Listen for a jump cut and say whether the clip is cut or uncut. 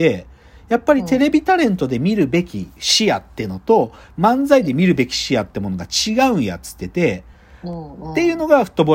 uncut